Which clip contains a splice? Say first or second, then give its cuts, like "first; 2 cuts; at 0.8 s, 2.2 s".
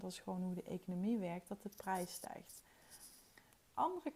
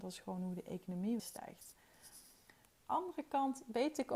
second; 1 cut; at 1.2 s